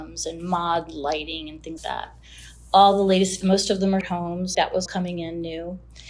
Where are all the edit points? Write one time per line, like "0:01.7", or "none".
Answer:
0:01.8
0:03.4
0:04.0
0:04.5
0:04.9